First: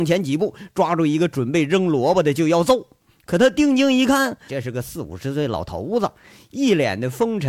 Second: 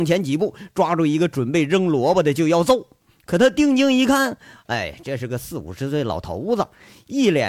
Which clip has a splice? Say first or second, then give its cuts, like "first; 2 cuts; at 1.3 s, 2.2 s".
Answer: first; 1 cut; at 4.5 s